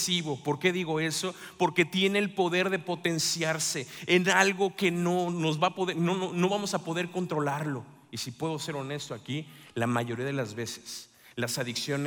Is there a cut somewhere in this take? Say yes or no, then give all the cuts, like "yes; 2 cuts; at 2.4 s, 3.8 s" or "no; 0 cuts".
no; 0 cuts